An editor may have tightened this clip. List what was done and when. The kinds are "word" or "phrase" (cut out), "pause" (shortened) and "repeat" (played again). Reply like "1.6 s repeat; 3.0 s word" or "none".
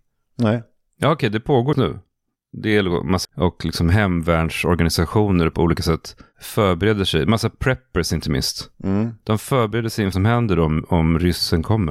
1.7 s word; 3.2 s word; 5.5 s phrase; 8.7 s pause; 10.1 s word